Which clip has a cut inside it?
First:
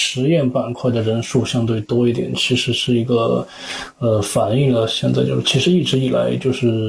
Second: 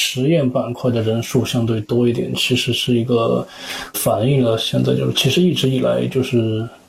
second; 1 cut; at 3.9 s

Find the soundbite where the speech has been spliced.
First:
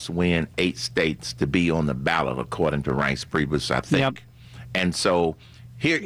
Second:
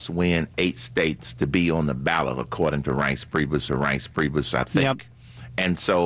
second; 1 cut; at 3.7 s

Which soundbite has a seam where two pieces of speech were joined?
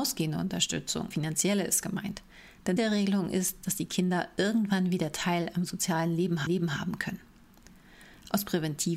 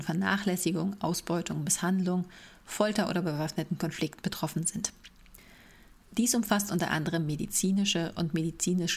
first; 3 cuts; at 1.1 s, 2.8 s, 6.5 s

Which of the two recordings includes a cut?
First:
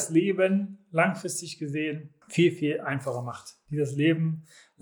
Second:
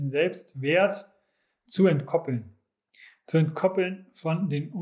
first; 1 cut; at 2.2 s

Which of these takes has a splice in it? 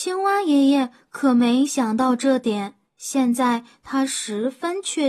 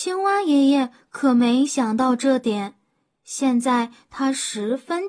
first; 1 cut; at 2.9 s

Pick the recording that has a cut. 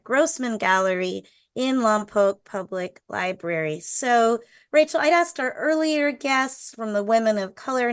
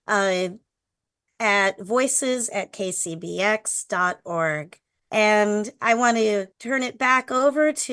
second; 2 cuts; at 4.9 s, 6.5 s

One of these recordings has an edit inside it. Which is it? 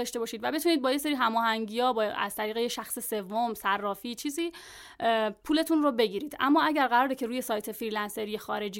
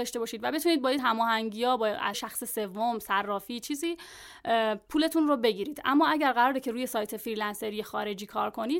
second; 2 cuts; at 1.0 s, 2.1 s

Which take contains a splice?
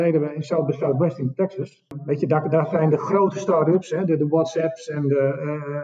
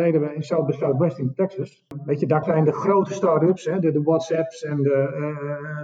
second; 1 cut; at 2.4 s

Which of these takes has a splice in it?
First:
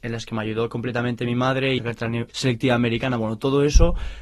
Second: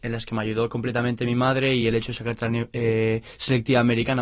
first; 2 cuts; at 1.8 s, 2.3 s

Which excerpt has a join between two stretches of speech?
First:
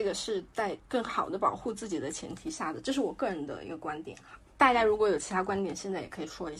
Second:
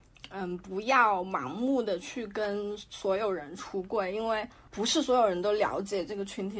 first; 1 cut; at 4.5 s

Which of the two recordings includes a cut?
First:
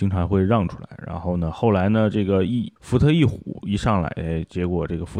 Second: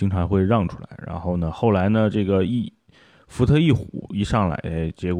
first; 1 cut; at 2.8 s

